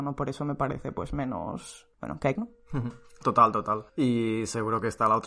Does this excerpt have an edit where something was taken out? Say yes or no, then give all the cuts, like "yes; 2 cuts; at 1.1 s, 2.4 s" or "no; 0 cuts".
yes; 3 cuts; at 1.9 s, 2.3 s, 3.9 s